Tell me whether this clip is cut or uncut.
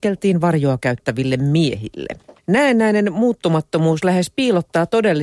cut